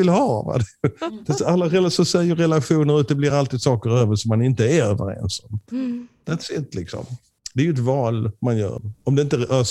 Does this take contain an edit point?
no; 0 cuts

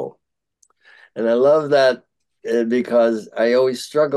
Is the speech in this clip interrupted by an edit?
no; 0 cuts

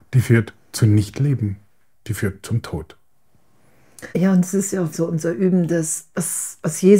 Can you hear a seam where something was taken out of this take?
yes; 2 cuts; at 4.1 s, 4.9 s

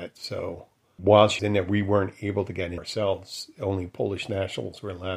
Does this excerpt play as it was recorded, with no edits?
no; 3 cuts; at 1.0 s, 1.4 s, 2.8 s

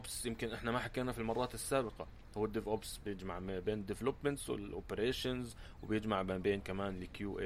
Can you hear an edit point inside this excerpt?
no; 0 cuts

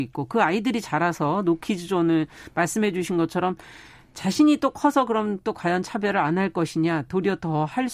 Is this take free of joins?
yes; 0 cuts

